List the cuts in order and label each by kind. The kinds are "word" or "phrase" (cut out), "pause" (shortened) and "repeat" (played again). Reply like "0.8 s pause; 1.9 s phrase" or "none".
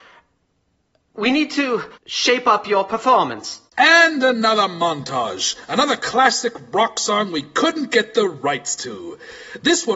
1.9 s pause; 3.7 s pause